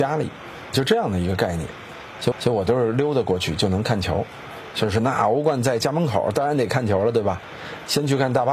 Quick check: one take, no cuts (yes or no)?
no